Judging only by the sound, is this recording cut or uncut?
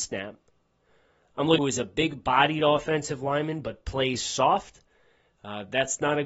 cut